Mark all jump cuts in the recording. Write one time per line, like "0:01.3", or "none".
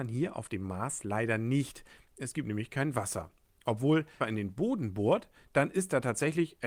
0:04.2

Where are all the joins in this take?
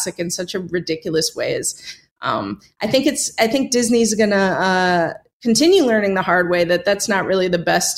none

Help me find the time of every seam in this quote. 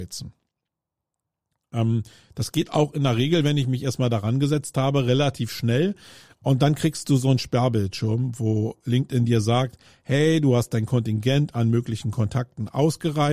none

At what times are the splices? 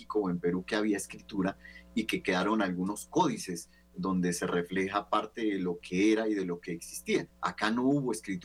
0:07.3

